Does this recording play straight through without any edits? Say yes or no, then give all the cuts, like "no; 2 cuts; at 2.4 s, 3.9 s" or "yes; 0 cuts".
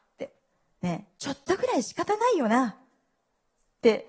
yes; 0 cuts